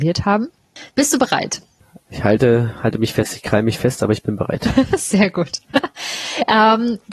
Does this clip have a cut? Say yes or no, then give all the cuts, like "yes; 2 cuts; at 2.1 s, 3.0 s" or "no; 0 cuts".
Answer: no; 0 cuts